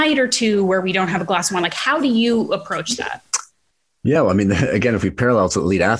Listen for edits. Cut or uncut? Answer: uncut